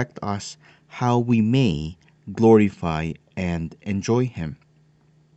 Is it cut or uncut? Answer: uncut